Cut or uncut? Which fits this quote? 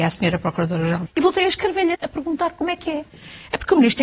cut